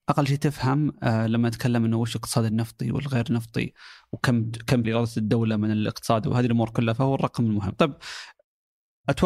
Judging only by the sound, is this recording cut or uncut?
cut